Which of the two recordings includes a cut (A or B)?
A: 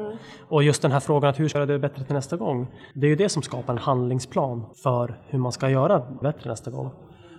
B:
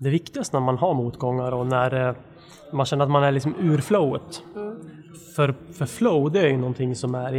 A